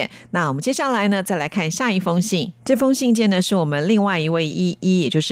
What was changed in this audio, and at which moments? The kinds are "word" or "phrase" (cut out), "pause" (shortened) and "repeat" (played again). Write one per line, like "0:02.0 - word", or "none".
0:02.6 - pause